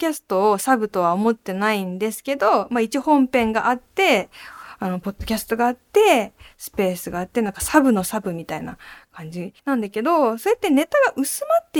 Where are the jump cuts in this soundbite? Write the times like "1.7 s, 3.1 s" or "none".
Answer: 9.6 s